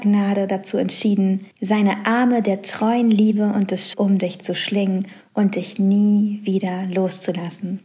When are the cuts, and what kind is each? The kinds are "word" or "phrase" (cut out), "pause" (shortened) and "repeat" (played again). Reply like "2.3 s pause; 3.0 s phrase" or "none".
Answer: 1.5 s pause; 3.9 s word